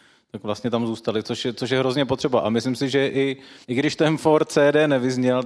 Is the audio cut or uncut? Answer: cut